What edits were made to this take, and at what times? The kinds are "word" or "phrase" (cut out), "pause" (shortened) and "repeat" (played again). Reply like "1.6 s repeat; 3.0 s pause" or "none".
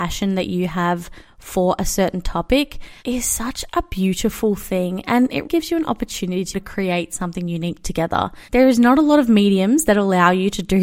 3.0 s pause; 5.4 s word; 6.5 s phrase; 8.5 s pause

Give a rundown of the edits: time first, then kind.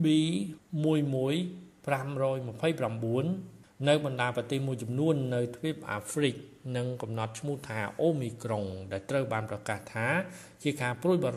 none

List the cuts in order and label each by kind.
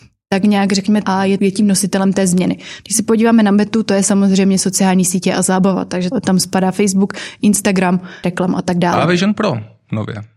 1.0 s word; 1.4 s word; 6.1 s word; 8.2 s word

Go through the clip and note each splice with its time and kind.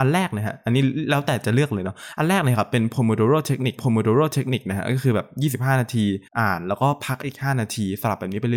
3.8 s repeat; 6.3 s pause

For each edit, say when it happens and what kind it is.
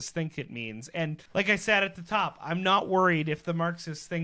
1.3 s pause

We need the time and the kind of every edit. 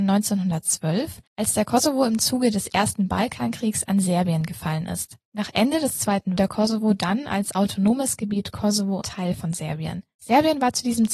1.3 s pause; 6.4 s phrase; 9.0 s phrase

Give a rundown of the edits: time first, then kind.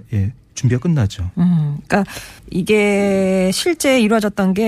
2.4 s pause

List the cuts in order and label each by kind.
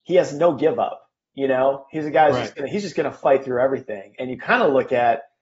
none

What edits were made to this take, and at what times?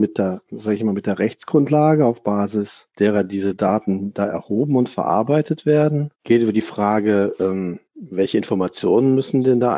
2.9 s pause; 6.2 s pause; 7.9 s pause

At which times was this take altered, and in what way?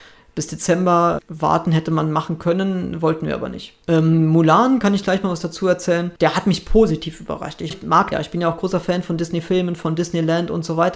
1.2 s word; 3.8 s pause; 6.2 s pause; 7.7 s word; 8.1 s word

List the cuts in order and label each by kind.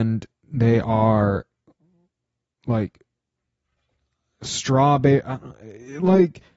none

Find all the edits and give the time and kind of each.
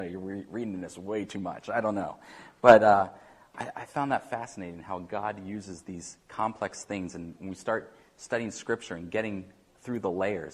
none

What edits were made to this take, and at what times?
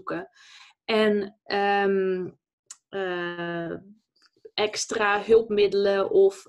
1.5 s word

